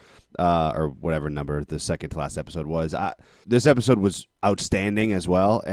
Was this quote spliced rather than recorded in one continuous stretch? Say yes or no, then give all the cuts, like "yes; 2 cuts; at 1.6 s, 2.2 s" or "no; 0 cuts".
yes; 1 cut; at 3.4 s